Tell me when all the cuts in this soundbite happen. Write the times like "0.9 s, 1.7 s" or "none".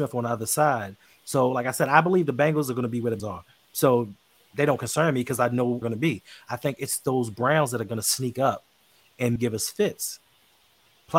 3.2 s, 5.8 s, 9.4 s